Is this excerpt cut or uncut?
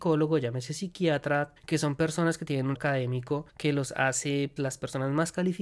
cut